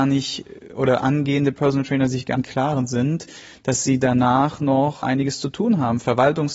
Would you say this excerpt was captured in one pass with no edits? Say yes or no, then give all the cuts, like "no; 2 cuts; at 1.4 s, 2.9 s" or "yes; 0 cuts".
no; 2 cuts; at 2.3 s, 5.0 s